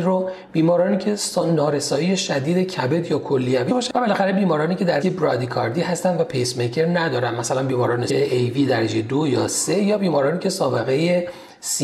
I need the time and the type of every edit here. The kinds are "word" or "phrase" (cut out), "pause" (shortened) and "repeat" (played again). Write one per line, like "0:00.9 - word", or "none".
0:03.7 - word
0:05.0 - word
0:08.1 - phrase